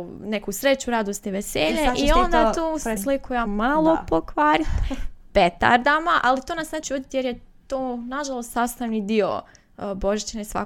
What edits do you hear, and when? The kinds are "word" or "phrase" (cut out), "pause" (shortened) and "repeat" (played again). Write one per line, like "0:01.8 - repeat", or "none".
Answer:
0:03.0 - word
0:03.5 - word
0:06.8 - word